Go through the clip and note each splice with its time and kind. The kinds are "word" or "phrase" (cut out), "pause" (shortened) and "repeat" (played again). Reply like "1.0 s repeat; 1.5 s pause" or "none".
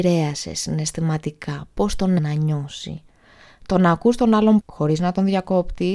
2.2 s word; 4.6 s word